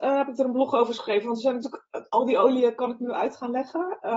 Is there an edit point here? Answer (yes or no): no